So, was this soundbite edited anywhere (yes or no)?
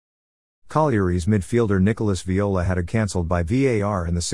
yes